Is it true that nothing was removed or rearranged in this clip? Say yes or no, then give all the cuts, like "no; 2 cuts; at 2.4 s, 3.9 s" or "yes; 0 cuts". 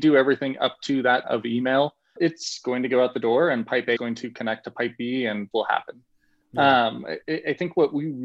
no; 4 cuts; at 1.2 s, 2.2 s, 4.0 s, 5.5 s